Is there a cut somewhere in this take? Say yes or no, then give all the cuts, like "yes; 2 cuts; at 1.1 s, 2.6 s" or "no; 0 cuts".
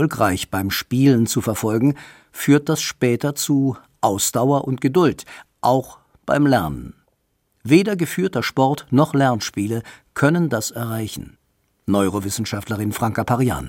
no; 0 cuts